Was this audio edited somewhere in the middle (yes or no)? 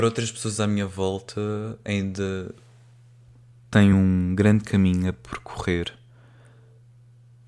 no